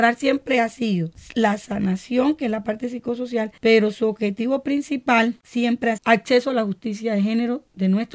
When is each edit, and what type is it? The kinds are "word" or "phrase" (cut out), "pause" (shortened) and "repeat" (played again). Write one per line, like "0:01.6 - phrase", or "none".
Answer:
0:06.0 - word